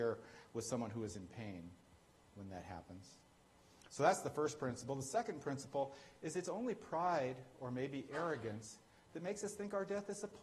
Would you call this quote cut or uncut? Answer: uncut